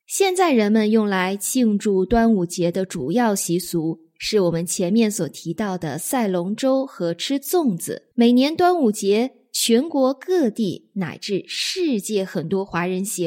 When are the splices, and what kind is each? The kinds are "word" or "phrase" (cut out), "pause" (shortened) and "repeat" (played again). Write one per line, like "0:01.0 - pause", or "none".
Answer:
0:08.1 - pause

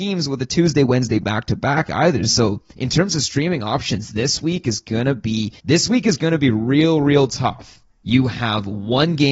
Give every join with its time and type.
0:05.6 - pause

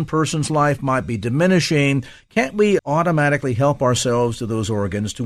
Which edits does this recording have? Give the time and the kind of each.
0:02.8 - word

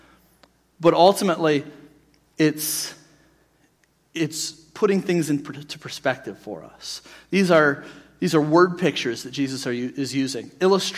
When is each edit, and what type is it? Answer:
none

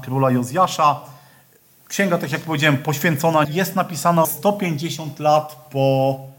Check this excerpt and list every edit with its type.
0:03.4 - word
0:04.2 - word

